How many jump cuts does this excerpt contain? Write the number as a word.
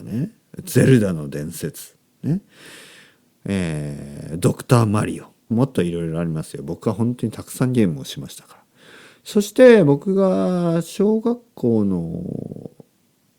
one